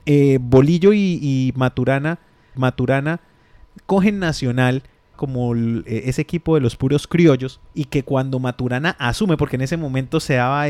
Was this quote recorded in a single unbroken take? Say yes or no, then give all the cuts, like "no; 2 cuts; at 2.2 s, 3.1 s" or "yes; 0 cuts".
no; 3 cuts; at 2.6 s, 5.1 s, 7.7 s